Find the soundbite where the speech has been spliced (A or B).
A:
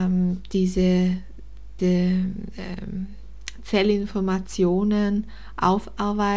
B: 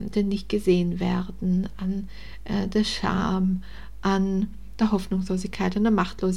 A